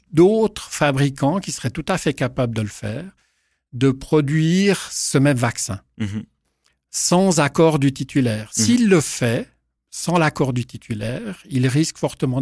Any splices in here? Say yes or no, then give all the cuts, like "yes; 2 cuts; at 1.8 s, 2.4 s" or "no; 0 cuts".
no; 0 cuts